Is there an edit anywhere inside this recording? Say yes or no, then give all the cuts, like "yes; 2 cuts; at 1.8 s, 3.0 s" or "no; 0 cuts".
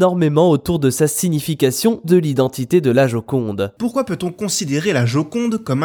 yes; 1 cut; at 2.0 s